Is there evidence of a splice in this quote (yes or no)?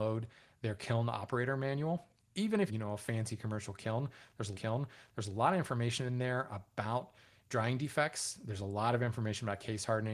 yes